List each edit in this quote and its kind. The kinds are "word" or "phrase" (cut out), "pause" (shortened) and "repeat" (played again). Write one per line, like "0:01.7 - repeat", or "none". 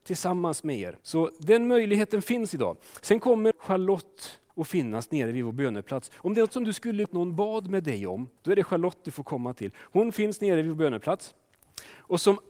0:01.0 - pause
0:03.5 - word
0:04.5 - pause
0:06.5 - word
0:07.0 - word
0:08.4 - pause